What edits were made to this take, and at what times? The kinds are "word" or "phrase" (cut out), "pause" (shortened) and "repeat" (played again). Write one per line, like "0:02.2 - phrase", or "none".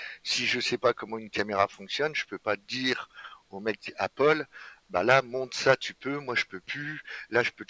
none